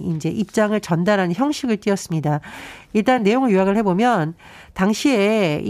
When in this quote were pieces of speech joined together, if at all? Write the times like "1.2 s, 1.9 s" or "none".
none